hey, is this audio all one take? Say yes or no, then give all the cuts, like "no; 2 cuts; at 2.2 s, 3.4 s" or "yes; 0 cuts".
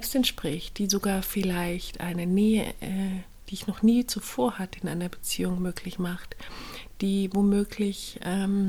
yes; 0 cuts